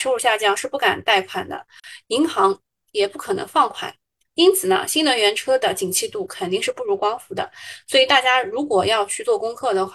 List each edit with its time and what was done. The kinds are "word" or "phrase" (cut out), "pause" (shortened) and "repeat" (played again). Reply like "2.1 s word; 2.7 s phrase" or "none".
4.0 s pause